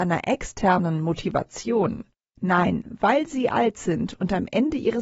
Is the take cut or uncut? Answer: uncut